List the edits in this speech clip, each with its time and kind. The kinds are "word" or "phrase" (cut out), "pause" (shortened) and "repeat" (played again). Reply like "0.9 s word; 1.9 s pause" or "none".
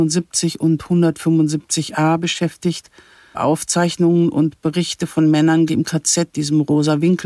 3.3 s word; 5.7 s word; 6.3 s word